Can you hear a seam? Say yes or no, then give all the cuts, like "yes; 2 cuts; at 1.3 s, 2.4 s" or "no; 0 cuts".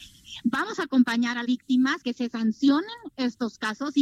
yes; 2 cuts; at 1.4 s, 2.0 s